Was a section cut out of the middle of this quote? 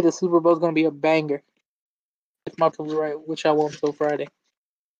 yes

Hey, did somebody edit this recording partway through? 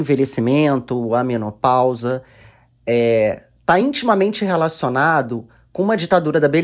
no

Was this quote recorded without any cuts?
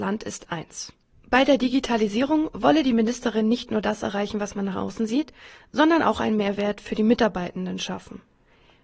yes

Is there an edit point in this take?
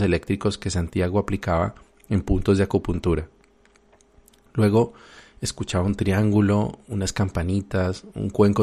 no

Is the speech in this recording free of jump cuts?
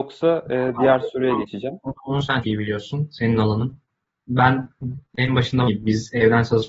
no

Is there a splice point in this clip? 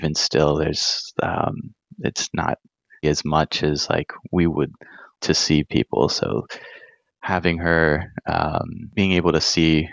yes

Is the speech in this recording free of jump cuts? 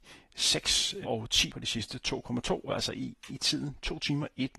no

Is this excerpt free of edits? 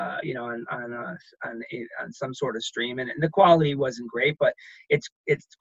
yes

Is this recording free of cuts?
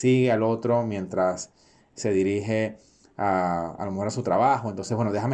yes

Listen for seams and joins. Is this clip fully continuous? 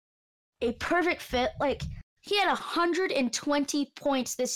no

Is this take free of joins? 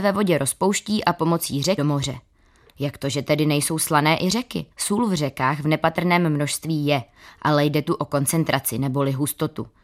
no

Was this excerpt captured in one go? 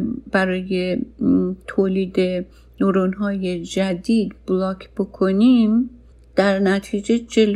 yes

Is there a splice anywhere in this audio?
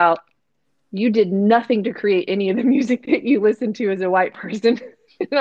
no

